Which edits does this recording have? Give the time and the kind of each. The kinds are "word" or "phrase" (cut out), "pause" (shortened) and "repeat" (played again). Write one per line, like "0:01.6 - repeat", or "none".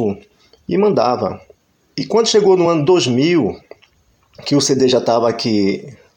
none